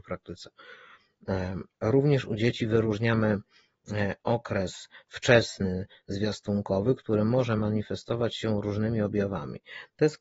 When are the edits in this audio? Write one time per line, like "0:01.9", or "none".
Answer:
none